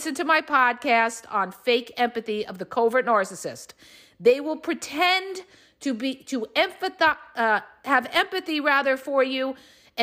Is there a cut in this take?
no; 0 cuts

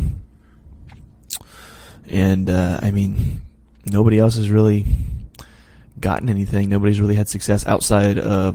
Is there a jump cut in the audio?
no; 0 cuts

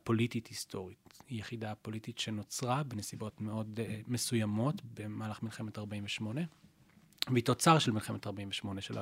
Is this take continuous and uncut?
yes; 0 cuts

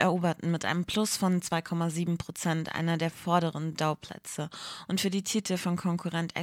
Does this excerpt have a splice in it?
no; 0 cuts

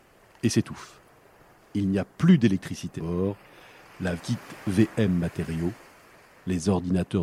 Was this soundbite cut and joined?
yes; 2 cuts; at 3.0 s, 4.2 s

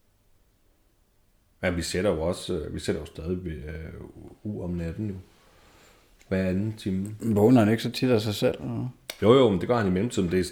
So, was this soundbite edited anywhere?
no; 0 cuts

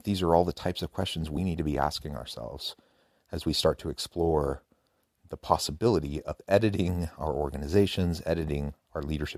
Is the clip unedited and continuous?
yes; 0 cuts

